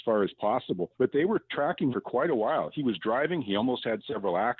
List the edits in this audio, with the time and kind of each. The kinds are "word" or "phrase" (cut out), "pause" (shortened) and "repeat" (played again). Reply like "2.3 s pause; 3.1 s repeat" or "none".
0.9 s pause; 1.9 s word